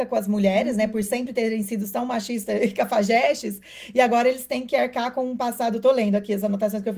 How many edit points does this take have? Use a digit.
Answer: 0